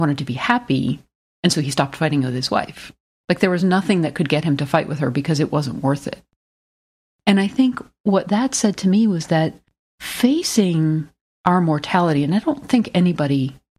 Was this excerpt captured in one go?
yes; 0 cuts

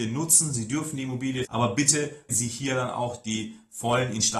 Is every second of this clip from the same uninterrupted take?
no; 2 cuts; at 1.4 s, 2.3 s

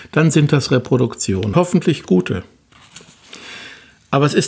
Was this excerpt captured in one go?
no; 1 cut; at 1.5 s

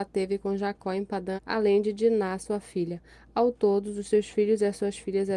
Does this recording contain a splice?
yes; 1 cut; at 1.4 s

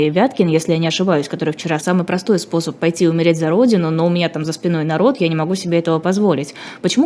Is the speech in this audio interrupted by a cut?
yes; 1 cut; at 1.8 s

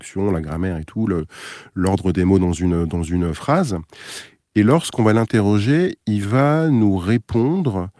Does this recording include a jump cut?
no; 0 cuts

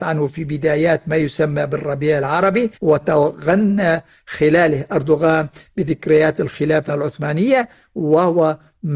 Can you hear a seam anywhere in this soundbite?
yes; 2 cuts; at 2.7 s, 6.9 s

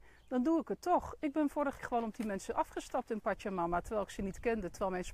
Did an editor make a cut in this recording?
yes; 1 cut; at 1.8 s

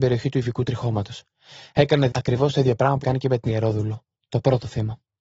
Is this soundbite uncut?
no; 3 cuts; at 2.1 s, 3.0 s, 3.5 s

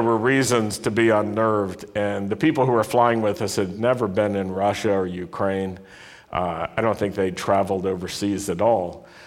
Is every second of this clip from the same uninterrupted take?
yes; 0 cuts

